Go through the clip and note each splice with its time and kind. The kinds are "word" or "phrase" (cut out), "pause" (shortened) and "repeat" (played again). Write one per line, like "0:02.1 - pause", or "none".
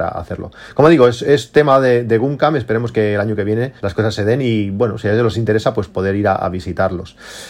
0:03.8 - pause